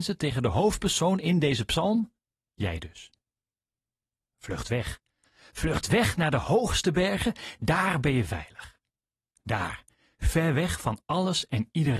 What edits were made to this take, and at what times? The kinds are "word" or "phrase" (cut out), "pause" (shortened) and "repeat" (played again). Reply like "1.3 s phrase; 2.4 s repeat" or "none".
none

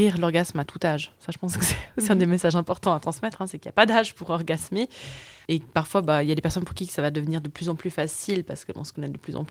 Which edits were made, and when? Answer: none

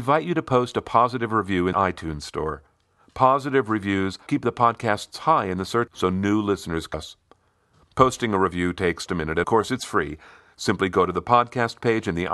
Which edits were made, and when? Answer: 1.7 s word; 4.3 s word; 5.9 s word; 6.9 s word; 9.1 s word; 9.4 s word

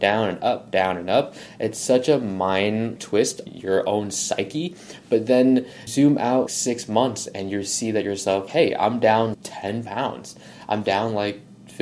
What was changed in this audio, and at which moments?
3.0 s word; 3.5 s word; 5.9 s word; 6.5 s word; 8.5 s word; 9.3 s word

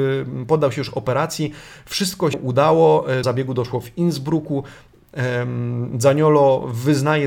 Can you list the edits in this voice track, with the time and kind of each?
2.3 s word; 3.2 s word

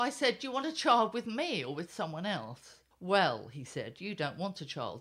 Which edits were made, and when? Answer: 2.9 s pause

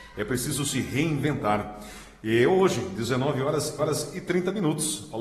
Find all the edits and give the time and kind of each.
3.8 s repeat

